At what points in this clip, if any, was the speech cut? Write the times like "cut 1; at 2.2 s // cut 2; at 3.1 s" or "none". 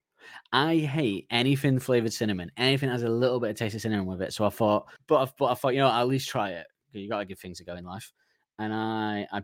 cut 1; at 5.0 s